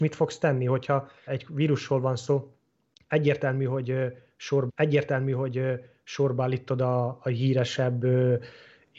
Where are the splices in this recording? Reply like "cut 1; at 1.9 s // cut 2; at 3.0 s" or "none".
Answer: cut 1; at 1.3 s // cut 2; at 4.7 s